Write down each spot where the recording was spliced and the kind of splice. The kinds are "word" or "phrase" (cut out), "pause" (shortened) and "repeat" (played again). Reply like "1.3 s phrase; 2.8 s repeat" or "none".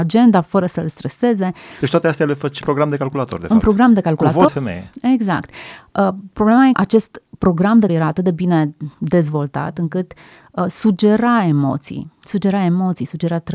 2.6 s word; 4.5 s phrase; 6.7 s word; 7.9 s word; 8.9 s pause; 12.1 s pause